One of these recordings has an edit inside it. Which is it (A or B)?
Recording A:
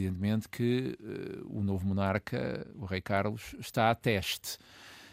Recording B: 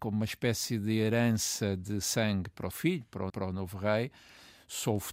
B